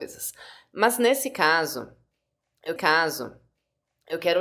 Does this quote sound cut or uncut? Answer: cut